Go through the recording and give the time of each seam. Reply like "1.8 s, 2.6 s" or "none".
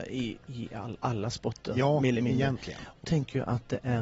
3.0 s